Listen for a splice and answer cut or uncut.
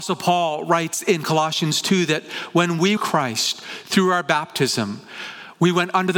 cut